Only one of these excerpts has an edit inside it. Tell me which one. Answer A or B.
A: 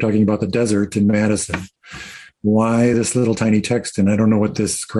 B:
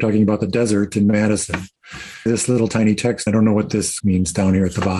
B